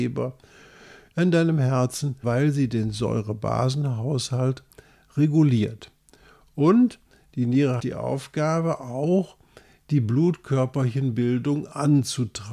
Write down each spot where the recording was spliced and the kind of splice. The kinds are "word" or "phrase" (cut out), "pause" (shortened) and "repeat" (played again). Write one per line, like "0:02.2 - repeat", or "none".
0:02.2 - phrase
0:07.8 - word